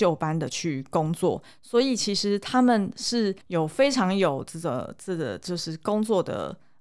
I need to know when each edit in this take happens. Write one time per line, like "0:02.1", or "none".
0:03.4